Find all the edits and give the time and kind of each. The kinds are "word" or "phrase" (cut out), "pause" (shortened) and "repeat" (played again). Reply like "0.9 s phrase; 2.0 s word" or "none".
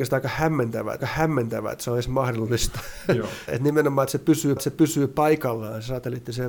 1.0 s repeat; 3.5 s word; 4.6 s repeat

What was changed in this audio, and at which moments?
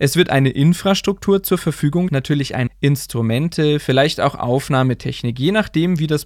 2.1 s word; 2.7 s word

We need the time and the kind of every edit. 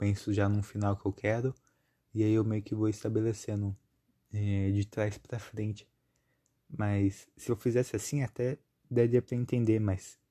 none

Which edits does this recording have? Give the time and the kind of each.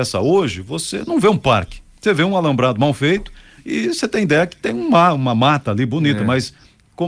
none

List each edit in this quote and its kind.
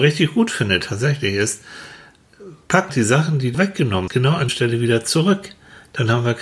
2.9 s word; 3.5 s word; 4.1 s word; 4.5 s word

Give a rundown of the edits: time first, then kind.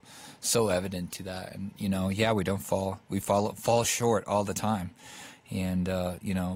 none

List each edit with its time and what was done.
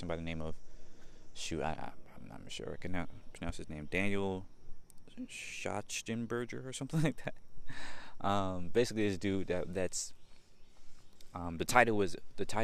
none

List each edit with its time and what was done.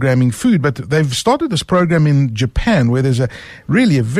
none

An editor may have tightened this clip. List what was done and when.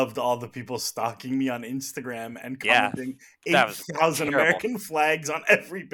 none

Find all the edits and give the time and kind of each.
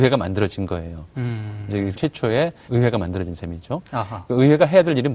1.9 s word; 2.7 s word

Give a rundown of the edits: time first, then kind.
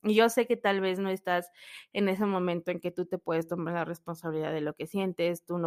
none

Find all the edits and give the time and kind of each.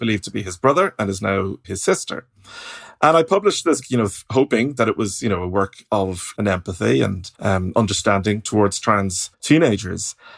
1.6 s word; 3.8 s word; 6.3 s phrase; 7.3 s pause; 9.3 s pause

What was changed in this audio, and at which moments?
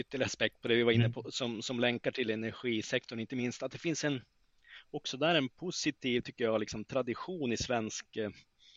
none

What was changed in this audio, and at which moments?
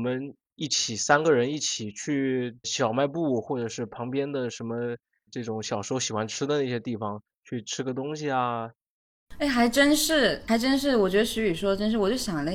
2.6 s word; 5.3 s word

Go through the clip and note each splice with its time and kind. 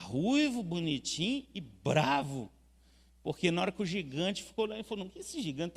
none

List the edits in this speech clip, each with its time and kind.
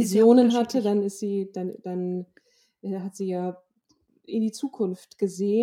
none

